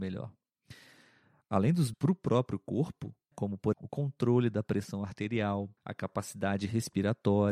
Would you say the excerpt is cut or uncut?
cut